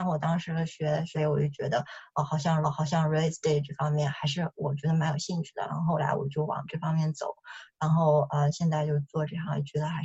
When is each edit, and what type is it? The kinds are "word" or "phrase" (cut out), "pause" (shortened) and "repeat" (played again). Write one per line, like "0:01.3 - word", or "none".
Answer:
0:01.2 - phrase
0:02.6 - repeat